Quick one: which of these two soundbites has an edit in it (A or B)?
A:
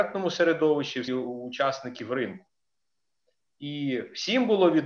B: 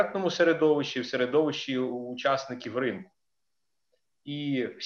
A